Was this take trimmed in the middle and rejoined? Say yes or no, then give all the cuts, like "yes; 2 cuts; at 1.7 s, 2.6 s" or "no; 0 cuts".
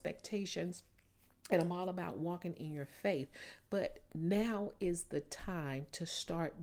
no; 0 cuts